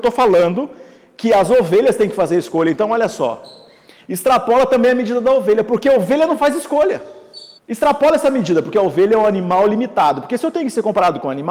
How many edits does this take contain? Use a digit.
1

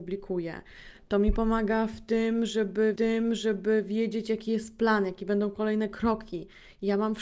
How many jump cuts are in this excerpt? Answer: 1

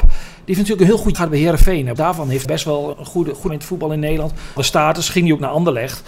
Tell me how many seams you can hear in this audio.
6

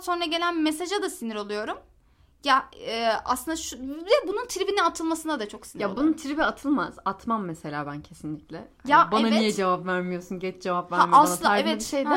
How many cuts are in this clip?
0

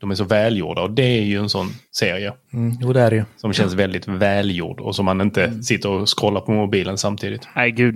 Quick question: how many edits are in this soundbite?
1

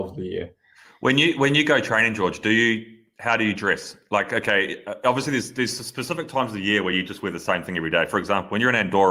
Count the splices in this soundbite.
0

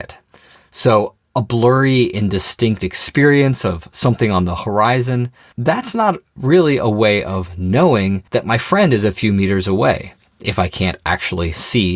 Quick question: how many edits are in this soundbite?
2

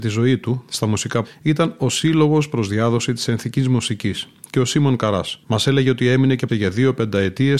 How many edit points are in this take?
3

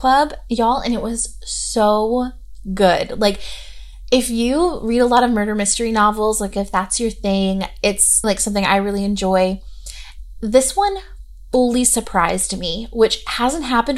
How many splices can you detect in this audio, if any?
1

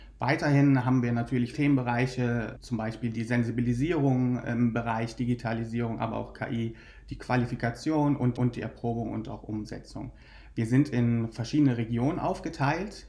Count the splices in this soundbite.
2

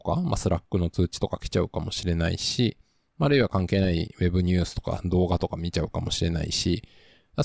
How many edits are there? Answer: 0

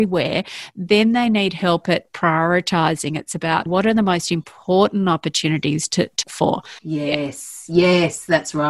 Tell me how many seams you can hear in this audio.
3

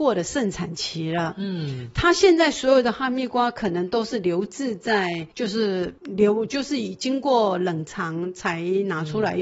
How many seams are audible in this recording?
2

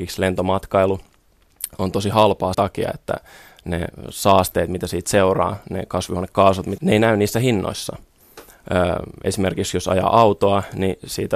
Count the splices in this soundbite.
2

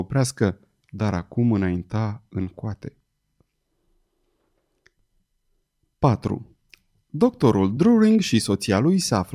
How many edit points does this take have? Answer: 0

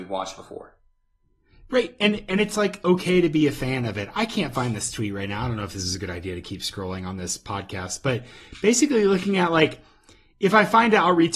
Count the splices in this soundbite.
0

